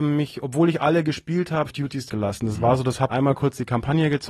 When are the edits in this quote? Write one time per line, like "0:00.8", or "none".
0:01.7
0:02.1
0:03.1